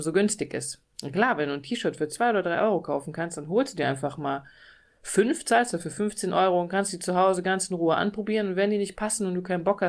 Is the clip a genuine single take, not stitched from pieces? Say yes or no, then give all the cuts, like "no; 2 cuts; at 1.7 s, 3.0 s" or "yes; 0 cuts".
yes; 0 cuts